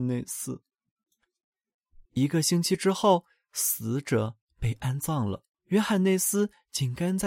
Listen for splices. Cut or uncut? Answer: cut